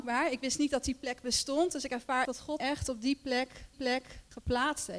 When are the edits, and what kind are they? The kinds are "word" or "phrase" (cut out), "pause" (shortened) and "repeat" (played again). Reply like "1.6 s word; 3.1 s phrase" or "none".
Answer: 2.2 s word; 2.6 s word; 3.7 s repeat